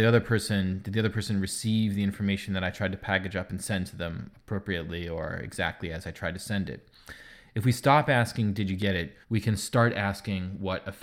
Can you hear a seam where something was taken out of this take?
yes; 1 cut; at 9.2 s

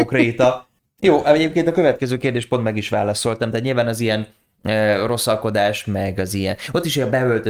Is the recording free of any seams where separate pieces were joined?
yes; 0 cuts

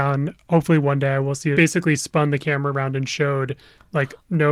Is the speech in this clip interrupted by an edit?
yes; 1 cut; at 1.5 s

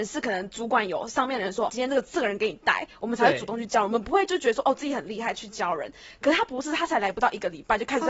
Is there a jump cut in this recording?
yes; 1 cut; at 1.7 s

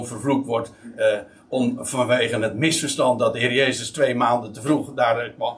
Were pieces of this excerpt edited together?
no; 0 cuts

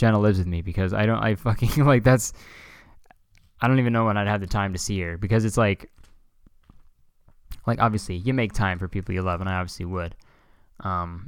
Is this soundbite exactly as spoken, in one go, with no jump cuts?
yes; 0 cuts

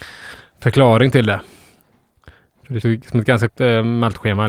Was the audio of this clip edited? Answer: yes; 2 cuts; at 2.8 s, 3.5 s

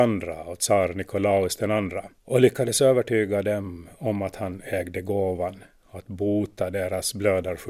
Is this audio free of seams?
no; 1 cut; at 2.2 s

